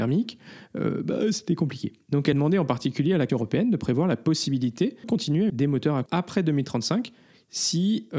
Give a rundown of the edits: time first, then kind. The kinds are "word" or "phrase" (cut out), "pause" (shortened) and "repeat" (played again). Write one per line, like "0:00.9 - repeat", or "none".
0:02.3 - word
0:03.3 - word
0:05.0 - word
0:05.5 - word
0:06.1 - word